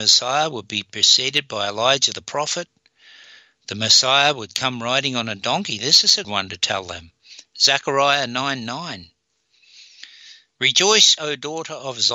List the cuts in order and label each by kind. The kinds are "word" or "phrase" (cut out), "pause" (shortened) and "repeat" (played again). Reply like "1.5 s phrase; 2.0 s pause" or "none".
6.2 s word; 11.2 s word